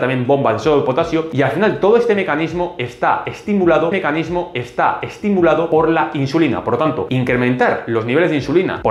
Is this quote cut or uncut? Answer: cut